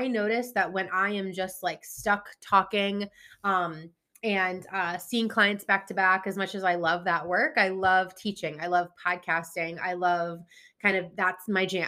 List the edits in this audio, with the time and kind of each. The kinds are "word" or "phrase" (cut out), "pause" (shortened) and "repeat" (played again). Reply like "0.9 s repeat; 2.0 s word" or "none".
none

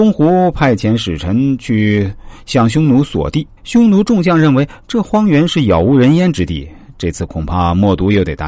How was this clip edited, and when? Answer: 3.6 s pause

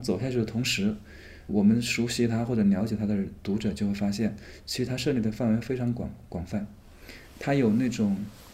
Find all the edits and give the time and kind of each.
1.5 s word

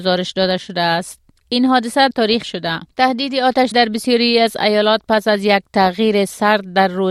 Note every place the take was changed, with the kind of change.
2.1 s word; 2.4 s phrase; 3.7 s word

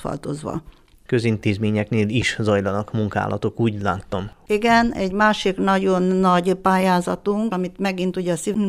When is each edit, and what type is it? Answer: 7.5 s word

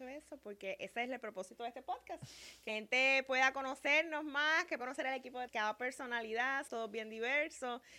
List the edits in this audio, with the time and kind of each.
2.7 s word; 4.8 s word; 5.5 s phrase; 6.7 s word

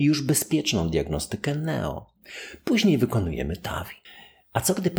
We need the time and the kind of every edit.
4.0 s pause

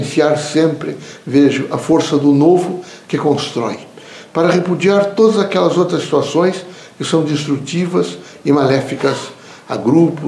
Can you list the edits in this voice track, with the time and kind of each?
none

